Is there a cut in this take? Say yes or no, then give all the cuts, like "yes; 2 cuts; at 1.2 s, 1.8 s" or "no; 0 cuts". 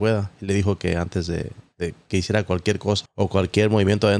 yes; 1 cut; at 3.0 s